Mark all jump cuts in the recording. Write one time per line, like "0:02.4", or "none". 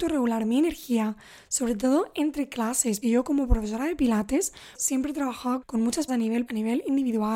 0:03.0
0:04.7
0:05.6
0:06.1
0:06.5